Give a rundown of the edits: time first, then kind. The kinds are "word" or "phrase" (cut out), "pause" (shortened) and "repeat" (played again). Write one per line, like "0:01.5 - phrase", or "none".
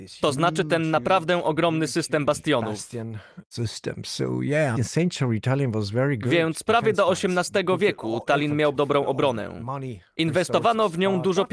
0:04.8 - phrase
0:08.7 - word